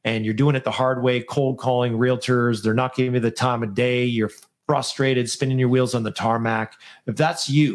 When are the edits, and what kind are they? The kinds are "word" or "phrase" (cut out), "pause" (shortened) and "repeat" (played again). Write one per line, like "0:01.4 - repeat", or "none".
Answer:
none